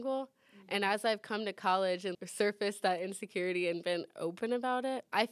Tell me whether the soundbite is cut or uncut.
cut